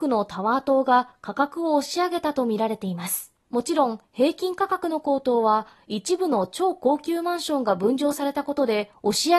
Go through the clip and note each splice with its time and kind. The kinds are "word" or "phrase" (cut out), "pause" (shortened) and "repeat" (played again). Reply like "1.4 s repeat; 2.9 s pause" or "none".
3.4 s pause